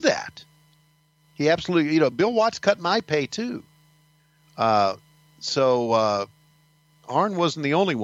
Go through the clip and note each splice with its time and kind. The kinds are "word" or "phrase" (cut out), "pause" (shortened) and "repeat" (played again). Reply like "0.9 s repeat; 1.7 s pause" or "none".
none